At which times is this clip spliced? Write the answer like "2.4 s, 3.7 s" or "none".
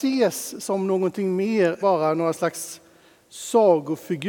1.8 s